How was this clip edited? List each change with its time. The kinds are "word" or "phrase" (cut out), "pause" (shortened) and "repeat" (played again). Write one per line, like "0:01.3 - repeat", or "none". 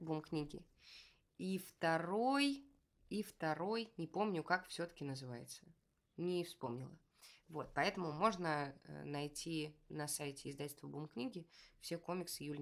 none